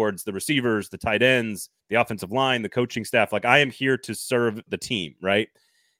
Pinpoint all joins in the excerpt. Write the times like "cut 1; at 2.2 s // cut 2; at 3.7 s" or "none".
cut 1; at 1.8 s // cut 2; at 4.7 s